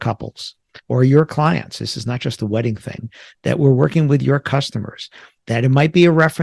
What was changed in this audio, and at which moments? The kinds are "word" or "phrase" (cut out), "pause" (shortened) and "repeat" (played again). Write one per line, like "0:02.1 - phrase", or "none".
none